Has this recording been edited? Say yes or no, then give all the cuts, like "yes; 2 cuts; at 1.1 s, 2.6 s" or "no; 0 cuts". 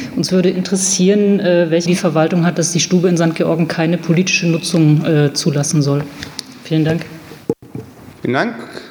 yes; 1 cut; at 1.9 s